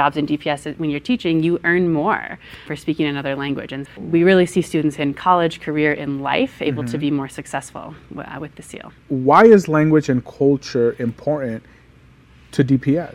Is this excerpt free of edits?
no; 2 cuts; at 2.7 s, 3.9 s

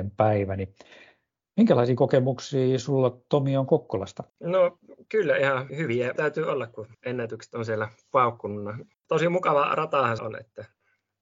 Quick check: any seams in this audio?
yes; 6 cuts; at 4.3 s, 5.7 s, 6.2 s, 6.9 s, 8.9 s, 10.2 s

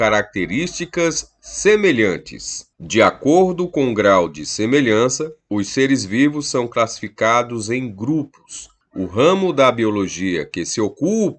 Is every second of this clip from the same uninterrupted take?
no; 1 cut; at 2.7 s

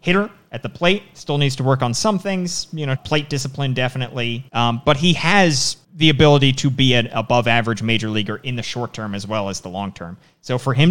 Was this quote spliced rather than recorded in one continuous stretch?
yes; 3 cuts; at 3.0 s, 4.5 s, 5.8 s

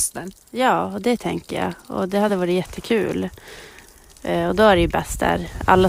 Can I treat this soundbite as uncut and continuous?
yes; 0 cuts

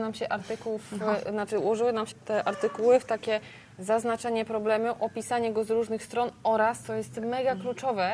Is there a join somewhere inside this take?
yes; 1 cut; at 2.1 s

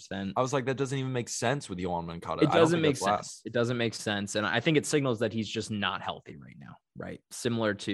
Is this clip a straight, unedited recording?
yes; 0 cuts

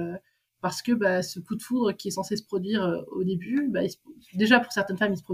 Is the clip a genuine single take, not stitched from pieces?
yes; 0 cuts

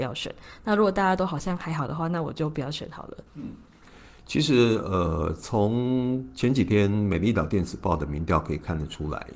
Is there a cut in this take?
yes; 1 cut; at 3.3 s

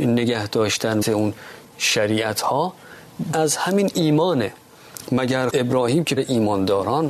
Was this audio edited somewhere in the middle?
yes; 4 cuts; at 1.0 s, 3.3 s, 5.5 s, 6.2 s

